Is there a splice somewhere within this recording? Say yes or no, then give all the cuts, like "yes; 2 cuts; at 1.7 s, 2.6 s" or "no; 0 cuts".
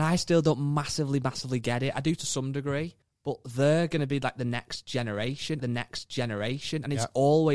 yes; 2 cuts; at 3.0 s, 5.6 s